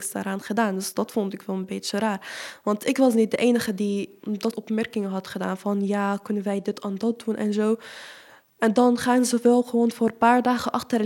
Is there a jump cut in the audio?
yes; 1 cut; at 4.5 s

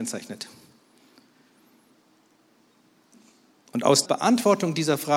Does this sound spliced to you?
yes; 1 cut; at 4.0 s

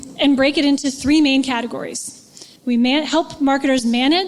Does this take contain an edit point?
yes; 1 cut; at 2.6 s

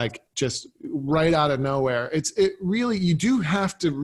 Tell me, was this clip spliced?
no; 0 cuts

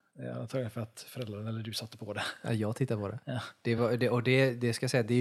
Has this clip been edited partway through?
no; 0 cuts

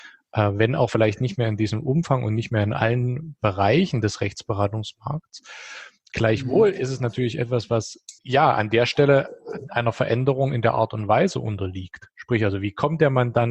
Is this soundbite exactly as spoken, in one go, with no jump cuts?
no; 1 cut; at 8.2 s

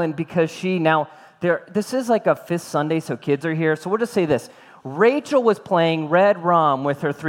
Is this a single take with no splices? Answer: yes; 0 cuts

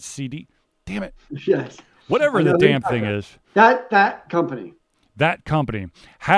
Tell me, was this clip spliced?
yes; 1 cut; at 3.4 s

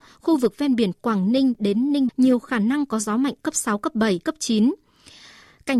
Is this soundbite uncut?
no; 2 cuts; at 2.1 s, 4.2 s

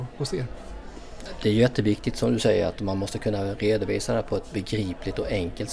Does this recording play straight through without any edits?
yes; 0 cuts

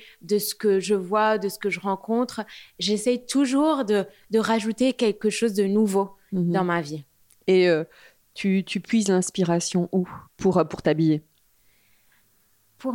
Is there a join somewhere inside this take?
yes; 1 cut; at 10.2 s

